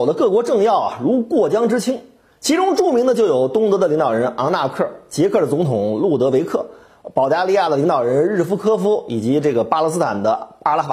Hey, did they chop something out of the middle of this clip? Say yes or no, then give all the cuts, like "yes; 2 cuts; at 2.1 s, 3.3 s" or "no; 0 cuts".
no; 0 cuts